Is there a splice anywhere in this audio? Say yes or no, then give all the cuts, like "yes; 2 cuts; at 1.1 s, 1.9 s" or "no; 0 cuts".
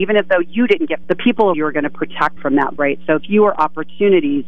yes; 5 cuts; at 1.0 s, 1.5 s, 2.4 s, 2.8 s, 3.2 s